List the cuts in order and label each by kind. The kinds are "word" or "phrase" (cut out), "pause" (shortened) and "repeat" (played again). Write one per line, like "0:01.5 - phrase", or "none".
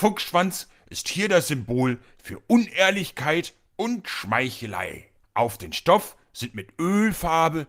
0:05.2 - pause